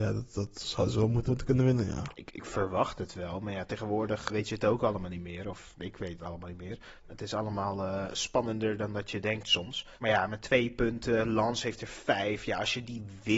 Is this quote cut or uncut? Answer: cut